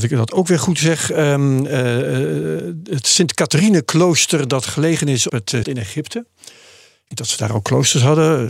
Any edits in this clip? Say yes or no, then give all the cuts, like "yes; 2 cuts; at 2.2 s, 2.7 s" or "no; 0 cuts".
yes; 3 cuts; at 5.3 s, 5.6 s, 7.1 s